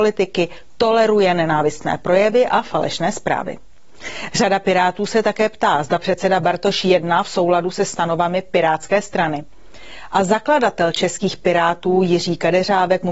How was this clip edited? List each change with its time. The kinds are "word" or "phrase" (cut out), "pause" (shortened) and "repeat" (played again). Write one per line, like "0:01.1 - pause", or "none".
none